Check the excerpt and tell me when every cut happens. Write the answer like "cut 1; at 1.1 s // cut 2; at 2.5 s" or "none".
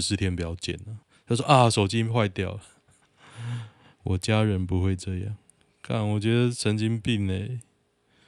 none